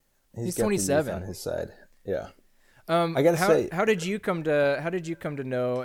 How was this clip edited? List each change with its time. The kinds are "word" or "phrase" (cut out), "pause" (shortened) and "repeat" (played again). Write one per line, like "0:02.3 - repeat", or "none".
none

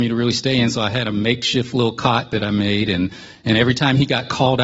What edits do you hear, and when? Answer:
0:03.5 - word

